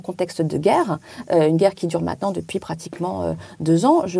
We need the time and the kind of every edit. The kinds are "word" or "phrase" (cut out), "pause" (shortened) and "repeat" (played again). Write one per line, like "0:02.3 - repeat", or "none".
none